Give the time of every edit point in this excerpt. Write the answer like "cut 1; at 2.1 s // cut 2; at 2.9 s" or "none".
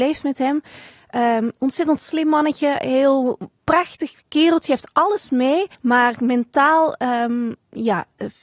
cut 1; at 5.7 s